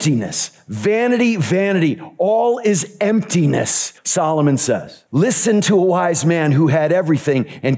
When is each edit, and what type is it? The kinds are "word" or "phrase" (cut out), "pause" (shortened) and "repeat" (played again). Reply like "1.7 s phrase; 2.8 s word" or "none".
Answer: 4.0 s pause; 5.1 s pause